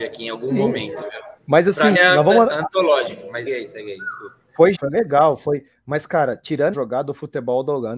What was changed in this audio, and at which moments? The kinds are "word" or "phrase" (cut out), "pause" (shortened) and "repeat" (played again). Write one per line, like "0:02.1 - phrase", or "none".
0:01.4 - pause
0:01.9 - word
0:03.5 - word
0:04.7 - word
0:06.7 - word